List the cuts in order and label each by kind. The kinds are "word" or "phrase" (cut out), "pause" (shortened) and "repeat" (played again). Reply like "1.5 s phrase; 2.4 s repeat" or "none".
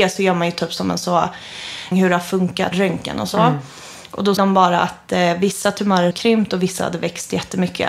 1.9 s word; 2.7 s word; 4.4 s word; 6.1 s word